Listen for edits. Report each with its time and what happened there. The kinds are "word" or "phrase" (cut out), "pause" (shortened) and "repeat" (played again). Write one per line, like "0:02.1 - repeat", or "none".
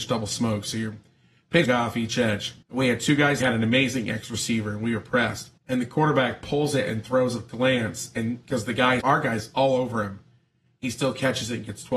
0:01.6 - phrase
0:02.6 - pause
0:03.4 - phrase
0:05.6 - pause
0:09.0 - phrase